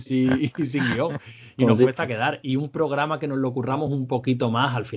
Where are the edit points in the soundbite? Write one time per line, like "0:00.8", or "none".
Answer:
none